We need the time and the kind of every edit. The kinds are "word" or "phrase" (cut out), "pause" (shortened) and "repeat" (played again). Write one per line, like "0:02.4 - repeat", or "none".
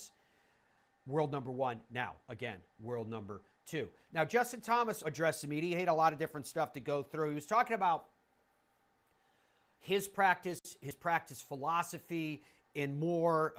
0:02.7 - pause
0:05.0 - word